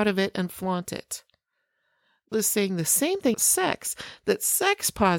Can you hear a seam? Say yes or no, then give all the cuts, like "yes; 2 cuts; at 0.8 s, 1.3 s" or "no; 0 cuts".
yes; 2 cuts; at 2.3 s, 3.3 s